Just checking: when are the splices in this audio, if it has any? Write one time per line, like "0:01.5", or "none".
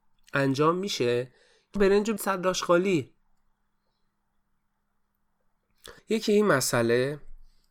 0:01.8
0:02.2
0:06.0